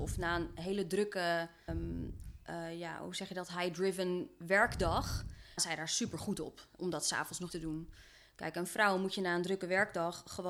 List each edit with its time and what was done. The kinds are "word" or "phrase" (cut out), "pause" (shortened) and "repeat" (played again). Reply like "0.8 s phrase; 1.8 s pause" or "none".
1.7 s word; 5.6 s word; 7.5 s word